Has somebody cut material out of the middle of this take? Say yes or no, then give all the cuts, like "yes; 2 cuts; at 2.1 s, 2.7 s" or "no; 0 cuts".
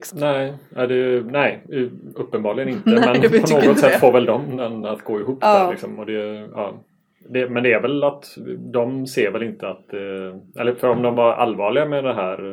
no; 0 cuts